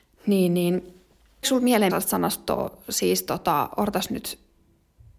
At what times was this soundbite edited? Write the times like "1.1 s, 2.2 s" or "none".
1.4 s, 1.9 s